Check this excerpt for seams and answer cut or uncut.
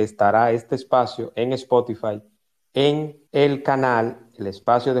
cut